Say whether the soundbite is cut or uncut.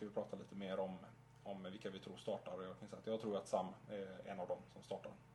uncut